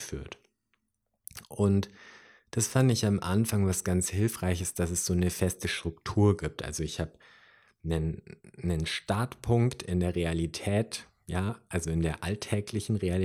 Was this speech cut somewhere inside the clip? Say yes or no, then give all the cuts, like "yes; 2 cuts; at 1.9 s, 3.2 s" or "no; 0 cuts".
no; 0 cuts